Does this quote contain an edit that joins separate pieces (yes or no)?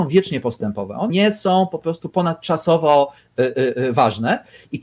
yes